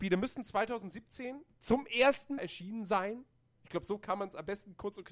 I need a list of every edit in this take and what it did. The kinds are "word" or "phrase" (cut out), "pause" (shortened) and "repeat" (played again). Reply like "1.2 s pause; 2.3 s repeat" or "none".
1.5 s pause; 2.4 s phrase